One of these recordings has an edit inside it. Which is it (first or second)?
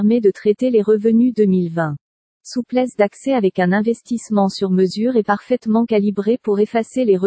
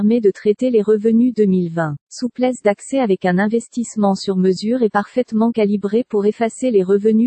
second